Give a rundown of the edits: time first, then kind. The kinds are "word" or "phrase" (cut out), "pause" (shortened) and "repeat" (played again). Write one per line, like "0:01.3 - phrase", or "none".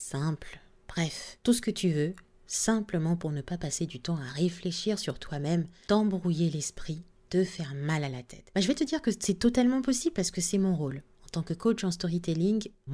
none